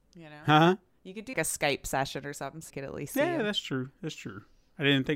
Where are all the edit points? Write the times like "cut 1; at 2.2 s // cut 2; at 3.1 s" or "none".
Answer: cut 1; at 1.3 s // cut 2; at 2.7 s